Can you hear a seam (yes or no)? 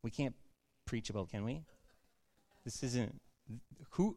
yes